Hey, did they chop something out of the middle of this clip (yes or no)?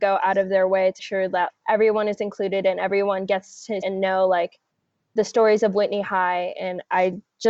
yes